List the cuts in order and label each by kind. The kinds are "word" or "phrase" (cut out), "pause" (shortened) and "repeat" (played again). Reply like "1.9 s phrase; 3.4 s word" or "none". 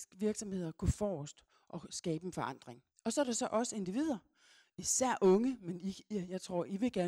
none